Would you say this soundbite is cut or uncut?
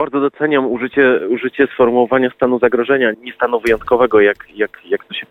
cut